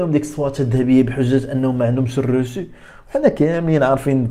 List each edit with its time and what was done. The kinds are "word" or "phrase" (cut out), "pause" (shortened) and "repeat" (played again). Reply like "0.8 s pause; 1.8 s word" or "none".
none